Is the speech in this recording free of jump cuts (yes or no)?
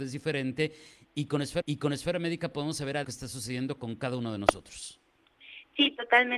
no